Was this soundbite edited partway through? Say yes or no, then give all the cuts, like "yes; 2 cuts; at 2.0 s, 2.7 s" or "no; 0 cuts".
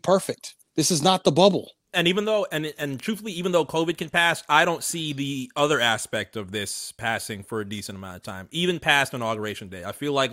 no; 0 cuts